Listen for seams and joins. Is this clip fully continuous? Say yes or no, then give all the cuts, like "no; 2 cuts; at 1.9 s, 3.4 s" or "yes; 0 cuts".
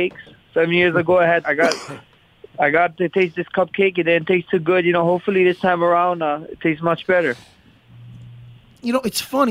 no; 1 cut; at 1.4 s